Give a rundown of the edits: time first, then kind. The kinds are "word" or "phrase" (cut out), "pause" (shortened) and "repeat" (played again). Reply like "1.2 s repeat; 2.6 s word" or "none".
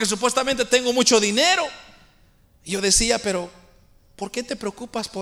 none